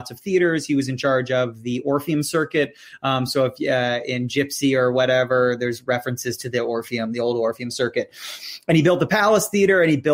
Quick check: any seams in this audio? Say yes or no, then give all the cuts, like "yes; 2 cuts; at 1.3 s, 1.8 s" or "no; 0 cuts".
no; 0 cuts